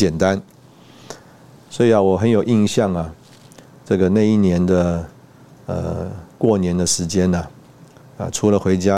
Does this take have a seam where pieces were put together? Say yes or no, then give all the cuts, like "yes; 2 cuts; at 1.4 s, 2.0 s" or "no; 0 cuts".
no; 0 cuts